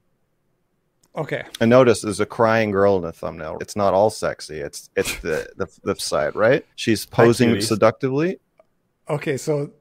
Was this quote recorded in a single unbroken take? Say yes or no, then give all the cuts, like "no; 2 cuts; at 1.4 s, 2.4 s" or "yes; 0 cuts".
no; 4 cuts; at 3.6 s, 6.0 s, 6.7 s, 8.6 s